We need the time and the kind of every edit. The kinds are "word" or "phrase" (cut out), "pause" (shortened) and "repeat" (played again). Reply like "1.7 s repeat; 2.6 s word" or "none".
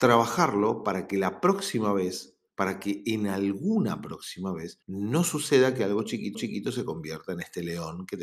4.8 s pause; 6.3 s repeat